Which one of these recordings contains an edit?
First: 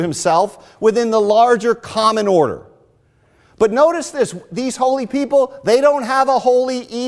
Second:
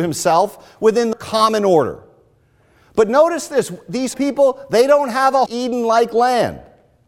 second; 3 cuts; at 1.1 s, 4.1 s, 5.5 s

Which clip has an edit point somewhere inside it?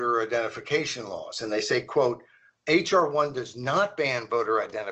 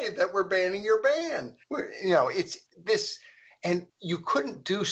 second; 3 cuts; at 1.6 s, 2.7 s, 3.9 s

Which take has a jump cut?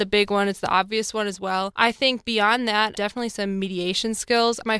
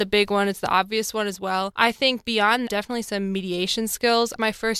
second; 1 cut; at 2.7 s

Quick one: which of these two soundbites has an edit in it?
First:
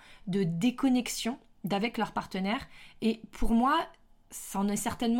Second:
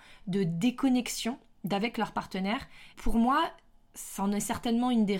second; 1 cut; at 2.9 s

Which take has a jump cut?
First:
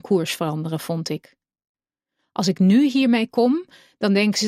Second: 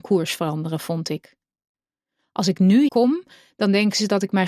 second; 1 cut; at 2.9 s

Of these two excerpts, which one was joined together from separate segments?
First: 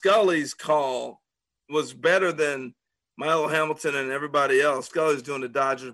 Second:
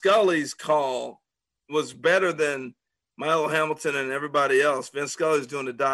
first; 1 cut; at 4.9 s

